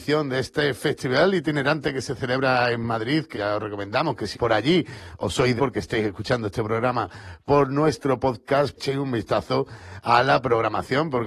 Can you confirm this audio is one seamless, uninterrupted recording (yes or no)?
no